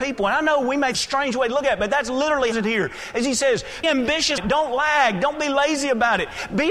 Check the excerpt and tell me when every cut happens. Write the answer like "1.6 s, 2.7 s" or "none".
0.9 s, 2.5 s, 3.8 s, 4.4 s